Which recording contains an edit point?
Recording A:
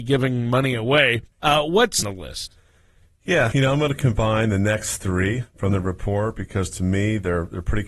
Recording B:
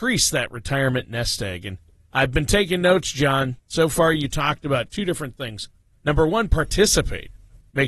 A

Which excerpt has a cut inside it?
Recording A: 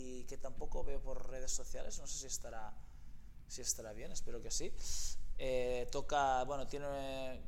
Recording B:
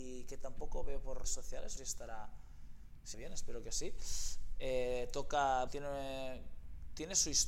B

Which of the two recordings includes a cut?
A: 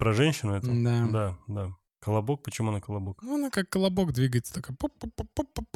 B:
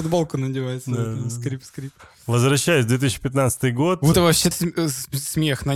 B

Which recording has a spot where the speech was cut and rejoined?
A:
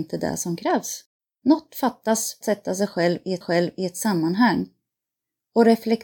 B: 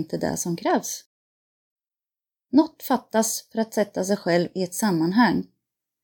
A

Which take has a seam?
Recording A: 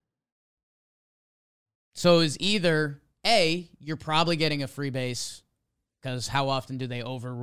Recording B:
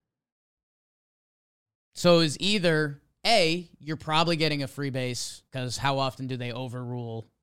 B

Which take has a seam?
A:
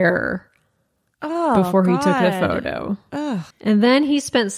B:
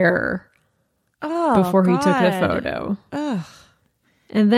A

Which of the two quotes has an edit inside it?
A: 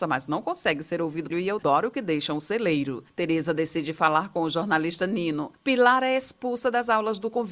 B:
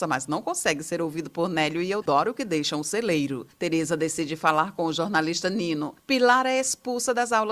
A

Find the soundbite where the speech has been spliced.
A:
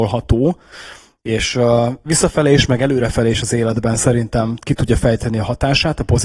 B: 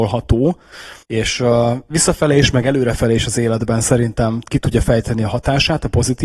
B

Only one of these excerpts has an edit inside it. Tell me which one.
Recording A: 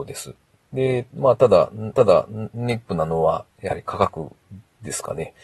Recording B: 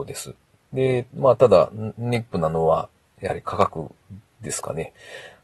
A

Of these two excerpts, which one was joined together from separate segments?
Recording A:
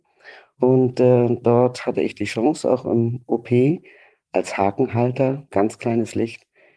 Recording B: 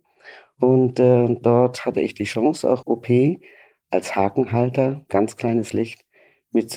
B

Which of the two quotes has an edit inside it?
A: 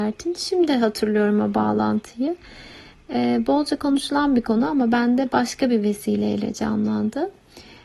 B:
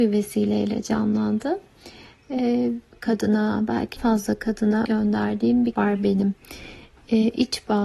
B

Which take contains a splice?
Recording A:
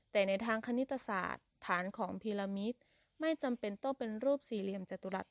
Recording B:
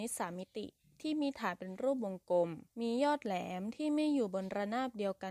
B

